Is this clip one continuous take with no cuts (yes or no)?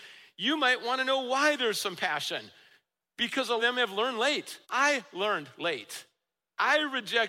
no